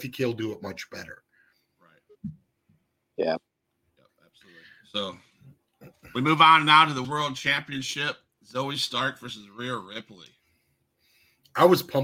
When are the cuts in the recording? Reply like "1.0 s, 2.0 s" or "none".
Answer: 7.0 s